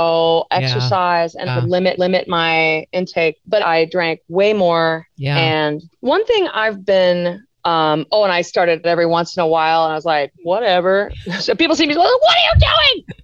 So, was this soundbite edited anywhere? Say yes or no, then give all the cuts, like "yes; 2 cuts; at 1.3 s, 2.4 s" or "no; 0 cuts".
yes; 8 cuts; at 1.5 s, 2.0 s, 3.6 s, 5.9 s, 7.5 s, 8.8 s, 10.4 s, 11.4 s